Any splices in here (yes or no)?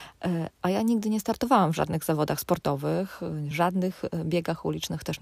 no